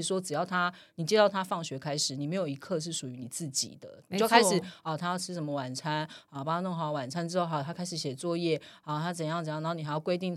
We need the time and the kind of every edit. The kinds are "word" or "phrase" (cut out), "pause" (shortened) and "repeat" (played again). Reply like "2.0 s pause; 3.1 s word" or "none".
none